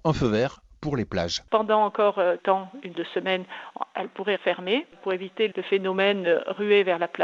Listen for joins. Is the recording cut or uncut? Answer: cut